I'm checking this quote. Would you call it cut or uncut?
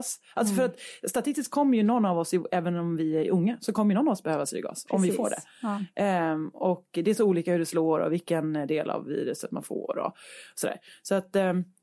uncut